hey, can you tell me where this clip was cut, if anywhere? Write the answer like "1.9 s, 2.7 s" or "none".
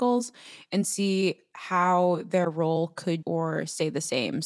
3.2 s